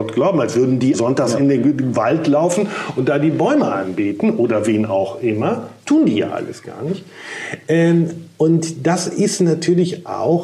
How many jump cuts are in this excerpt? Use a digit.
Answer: 1